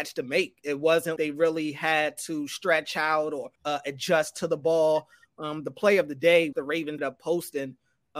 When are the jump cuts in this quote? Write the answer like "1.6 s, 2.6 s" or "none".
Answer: 1.2 s, 3.6 s, 6.5 s, 7.0 s